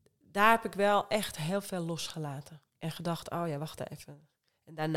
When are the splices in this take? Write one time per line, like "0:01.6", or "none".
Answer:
0:02.7